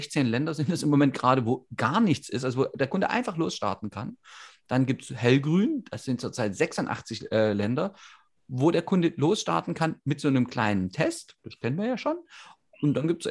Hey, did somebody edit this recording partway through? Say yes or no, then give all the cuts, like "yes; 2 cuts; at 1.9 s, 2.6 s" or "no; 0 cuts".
no; 0 cuts